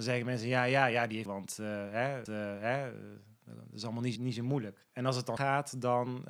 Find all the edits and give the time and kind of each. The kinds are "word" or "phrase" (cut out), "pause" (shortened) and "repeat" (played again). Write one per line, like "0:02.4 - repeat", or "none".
0:01.3 - phrase
0:02.3 - repeat
0:04.2 - word
0:04.9 - pause
0:05.4 - word